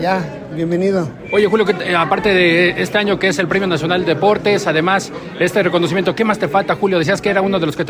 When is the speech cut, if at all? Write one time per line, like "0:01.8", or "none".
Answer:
none